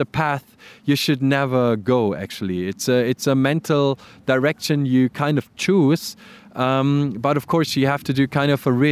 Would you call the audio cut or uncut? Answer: uncut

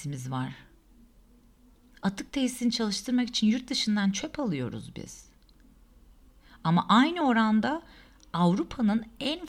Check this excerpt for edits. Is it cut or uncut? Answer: uncut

